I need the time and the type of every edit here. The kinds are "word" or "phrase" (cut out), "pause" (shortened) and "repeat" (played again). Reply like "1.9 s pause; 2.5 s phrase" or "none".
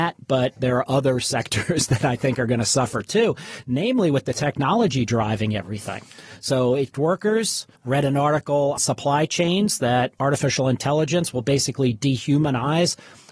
6.9 s phrase; 7.8 s pause; 8.8 s word